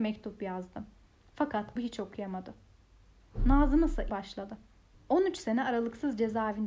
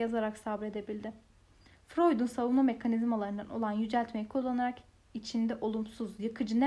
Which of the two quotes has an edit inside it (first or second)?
first